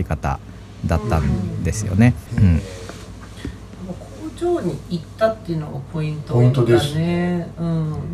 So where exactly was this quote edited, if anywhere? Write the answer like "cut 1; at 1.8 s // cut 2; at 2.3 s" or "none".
cut 1; at 2.3 s